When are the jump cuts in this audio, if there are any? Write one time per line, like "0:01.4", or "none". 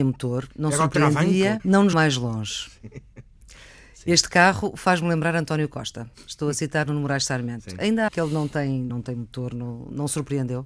0:01.6
0:01.9
0:08.1
0:08.9